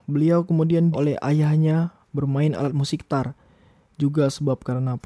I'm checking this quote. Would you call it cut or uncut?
cut